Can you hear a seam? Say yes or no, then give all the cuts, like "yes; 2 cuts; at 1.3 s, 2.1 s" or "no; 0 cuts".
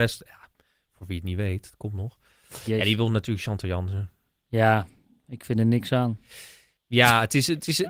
no; 0 cuts